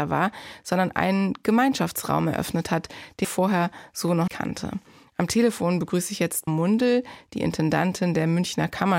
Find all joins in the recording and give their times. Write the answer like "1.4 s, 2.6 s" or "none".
3.2 s, 4.3 s, 6.5 s